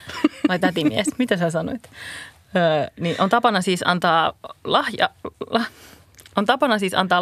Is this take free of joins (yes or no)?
yes